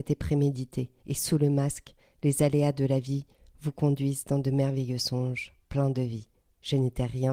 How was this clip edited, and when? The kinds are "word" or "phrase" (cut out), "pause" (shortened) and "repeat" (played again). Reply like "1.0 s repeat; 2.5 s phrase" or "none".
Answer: 1.0 s pause